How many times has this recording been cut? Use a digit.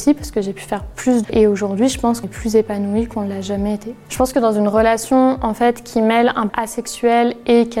3